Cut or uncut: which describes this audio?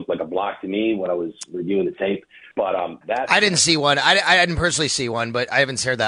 cut